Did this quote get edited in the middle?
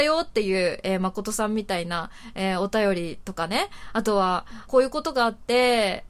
yes; 1 cut; at 4.7 s

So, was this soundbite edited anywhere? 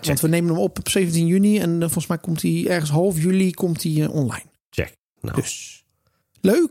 no; 0 cuts

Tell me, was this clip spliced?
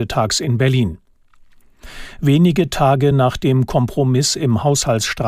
no; 0 cuts

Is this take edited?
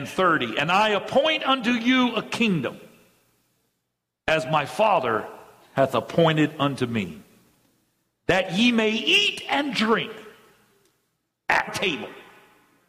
yes; 1 cut; at 11.7 s

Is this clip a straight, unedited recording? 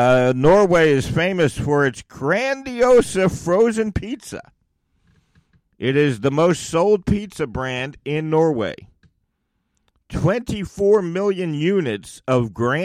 yes; 0 cuts

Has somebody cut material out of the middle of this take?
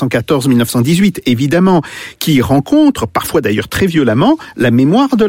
no; 0 cuts

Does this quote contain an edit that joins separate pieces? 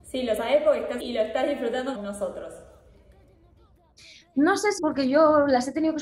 yes; 3 cuts; at 1.0 s, 1.9 s, 4.8 s

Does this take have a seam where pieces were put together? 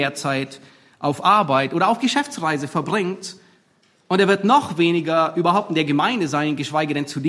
no; 0 cuts

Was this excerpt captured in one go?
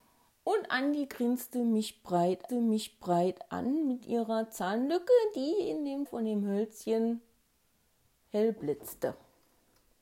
no; 2 cuts; at 2.5 s, 6.1 s

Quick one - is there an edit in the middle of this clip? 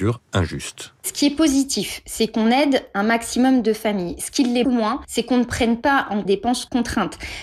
yes; 2 cuts; at 4.6 s, 6.2 s

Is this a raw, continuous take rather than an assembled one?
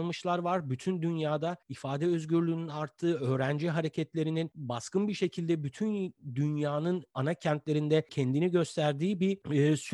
no; 1 cut; at 1.6 s

